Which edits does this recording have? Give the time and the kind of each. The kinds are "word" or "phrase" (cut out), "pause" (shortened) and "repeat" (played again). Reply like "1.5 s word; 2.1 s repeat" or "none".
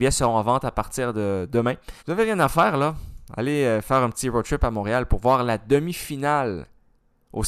2.0 s pause